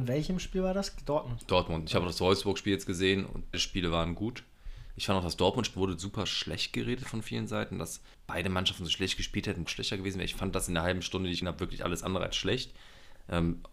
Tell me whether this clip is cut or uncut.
cut